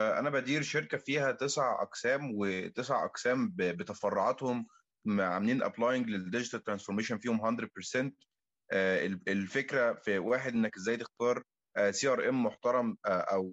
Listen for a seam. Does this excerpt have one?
no; 0 cuts

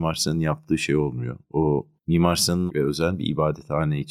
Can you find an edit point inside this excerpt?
yes; 2 cuts; at 2.0 s, 2.7 s

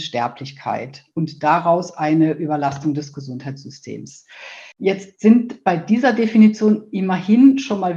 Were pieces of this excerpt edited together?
yes; 1 cut; at 4.7 s

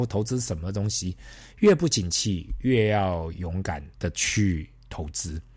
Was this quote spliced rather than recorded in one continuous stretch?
yes; 1 cut; at 3.9 s

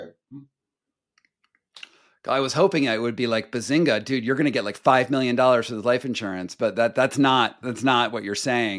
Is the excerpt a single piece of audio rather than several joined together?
yes; 0 cuts

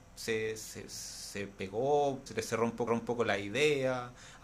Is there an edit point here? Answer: yes; 3 cuts; at 1.6 s, 2.3 s, 2.9 s

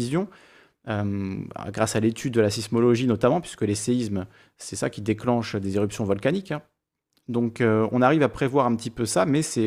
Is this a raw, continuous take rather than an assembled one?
yes; 0 cuts

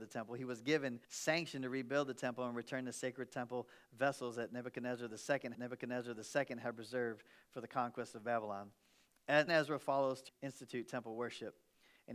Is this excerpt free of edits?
no; 4 cuts; at 1.0 s, 5.5 s, 9.5 s, 10.3 s

